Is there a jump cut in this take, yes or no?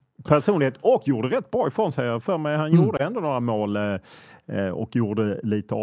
no